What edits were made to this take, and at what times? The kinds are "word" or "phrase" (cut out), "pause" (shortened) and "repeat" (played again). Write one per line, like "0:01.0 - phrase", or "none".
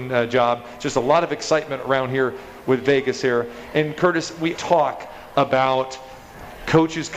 0:04.5 - word